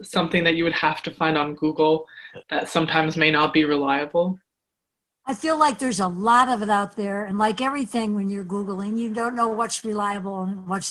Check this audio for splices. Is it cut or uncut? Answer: uncut